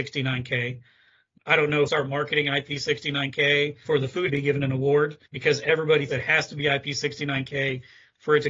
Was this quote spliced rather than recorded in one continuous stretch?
yes; 6 cuts; at 1.4 s, 1.9 s, 3.8 s, 4.3 s, 5.3 s, 6.1 s

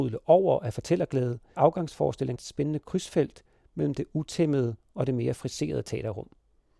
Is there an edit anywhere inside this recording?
yes; 2 cuts; at 1.6 s, 2.4 s

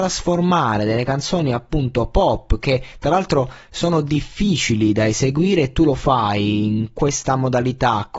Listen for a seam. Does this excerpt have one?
no; 0 cuts

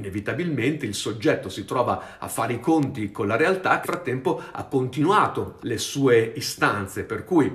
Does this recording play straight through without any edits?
no; 2 cuts; at 3.8 s, 5.6 s

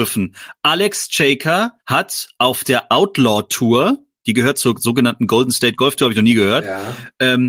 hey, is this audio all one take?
no; 1 cut; at 1.8 s

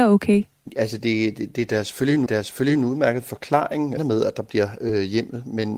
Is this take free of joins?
no; 2 cuts; at 2.3 s, 4.0 s

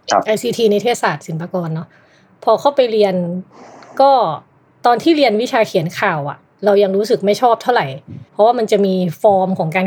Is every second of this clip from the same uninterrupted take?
no; 1 cut; at 8.3 s

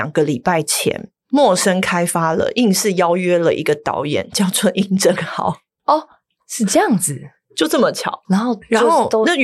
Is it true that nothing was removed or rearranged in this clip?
yes; 0 cuts

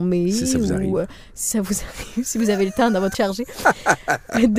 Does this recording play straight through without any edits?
no; 1 cut; at 3.1 s

